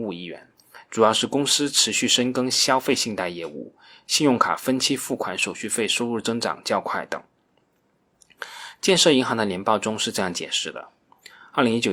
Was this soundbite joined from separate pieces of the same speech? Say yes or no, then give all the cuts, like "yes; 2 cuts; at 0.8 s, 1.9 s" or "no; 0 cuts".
no; 0 cuts